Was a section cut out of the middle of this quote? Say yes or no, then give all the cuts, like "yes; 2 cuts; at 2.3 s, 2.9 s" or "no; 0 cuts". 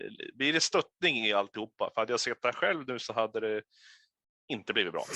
no; 0 cuts